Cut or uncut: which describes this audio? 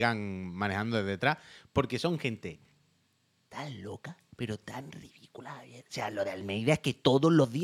uncut